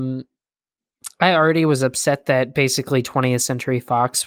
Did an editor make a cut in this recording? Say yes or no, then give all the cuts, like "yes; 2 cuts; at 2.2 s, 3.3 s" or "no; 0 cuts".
no; 0 cuts